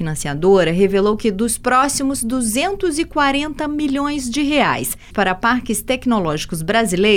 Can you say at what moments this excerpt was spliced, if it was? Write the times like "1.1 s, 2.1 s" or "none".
5.1 s